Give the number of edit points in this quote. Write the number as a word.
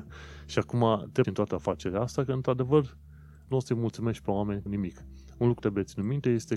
four